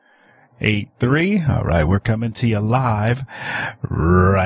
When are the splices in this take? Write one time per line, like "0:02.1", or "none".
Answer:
none